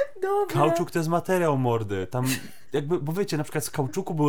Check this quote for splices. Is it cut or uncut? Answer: uncut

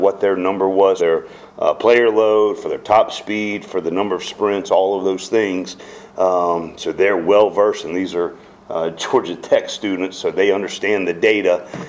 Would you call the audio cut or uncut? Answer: cut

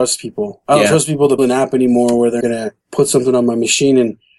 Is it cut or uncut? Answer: cut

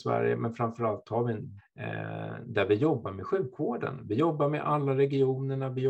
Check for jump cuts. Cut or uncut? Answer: cut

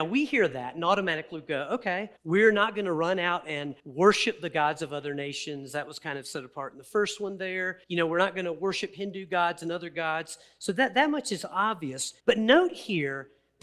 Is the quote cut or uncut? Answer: cut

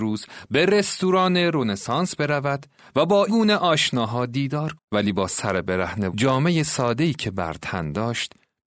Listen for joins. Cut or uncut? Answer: cut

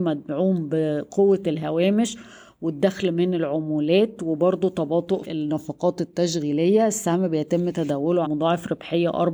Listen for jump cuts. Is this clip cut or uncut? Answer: cut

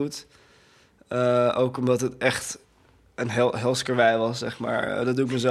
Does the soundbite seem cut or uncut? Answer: uncut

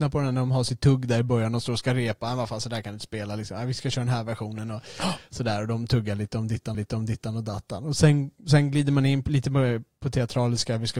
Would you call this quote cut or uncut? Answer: cut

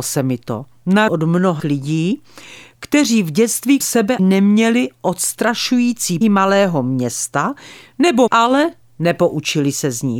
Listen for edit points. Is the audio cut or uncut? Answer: cut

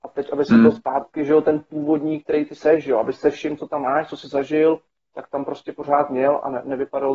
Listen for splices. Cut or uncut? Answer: uncut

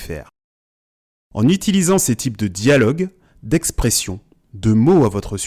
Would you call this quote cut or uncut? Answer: uncut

